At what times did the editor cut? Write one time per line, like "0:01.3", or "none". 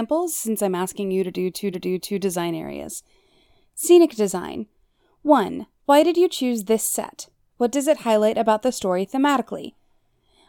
0:01.7